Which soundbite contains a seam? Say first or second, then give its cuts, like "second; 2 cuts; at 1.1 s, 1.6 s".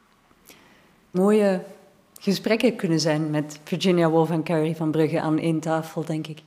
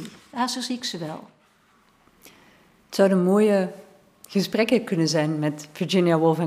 first; 1 cut; at 1.1 s